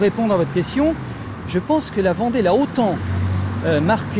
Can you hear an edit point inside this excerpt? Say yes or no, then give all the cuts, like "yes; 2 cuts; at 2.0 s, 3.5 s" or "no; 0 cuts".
no; 0 cuts